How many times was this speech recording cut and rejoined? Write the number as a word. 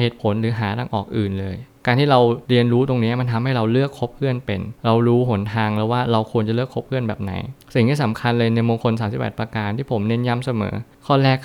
one